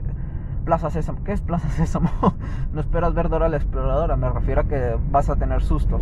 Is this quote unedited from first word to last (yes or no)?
yes